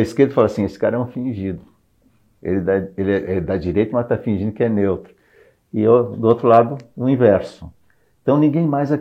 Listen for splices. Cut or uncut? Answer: uncut